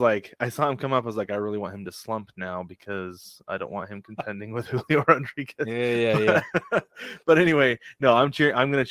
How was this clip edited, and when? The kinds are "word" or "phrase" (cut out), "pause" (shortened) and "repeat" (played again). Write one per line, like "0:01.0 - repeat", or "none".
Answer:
none